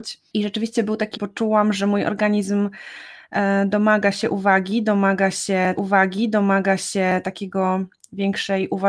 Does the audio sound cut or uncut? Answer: cut